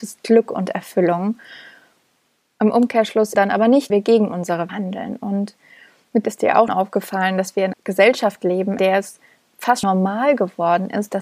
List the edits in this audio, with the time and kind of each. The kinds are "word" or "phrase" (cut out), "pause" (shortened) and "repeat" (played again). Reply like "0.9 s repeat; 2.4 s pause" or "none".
3.3 s word; 3.9 s word; 4.7 s word; 6.2 s word; 6.7 s word; 7.7 s word; 8.8 s word; 9.8 s word